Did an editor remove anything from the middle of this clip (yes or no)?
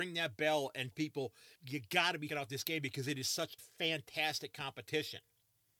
yes